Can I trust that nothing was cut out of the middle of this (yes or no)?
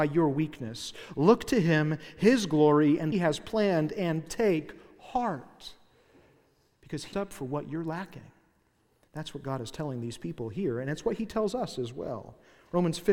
no